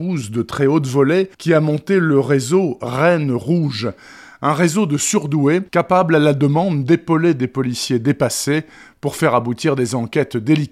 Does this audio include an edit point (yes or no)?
yes